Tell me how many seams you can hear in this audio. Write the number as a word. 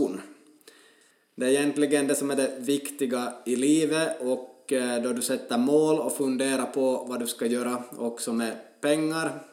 zero